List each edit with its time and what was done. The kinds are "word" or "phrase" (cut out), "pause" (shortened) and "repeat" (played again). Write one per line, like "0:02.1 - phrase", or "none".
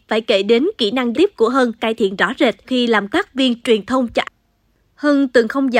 0:01.1 - word
0:01.8 - word
0:02.6 - word
0:03.1 - word
0:04.2 - word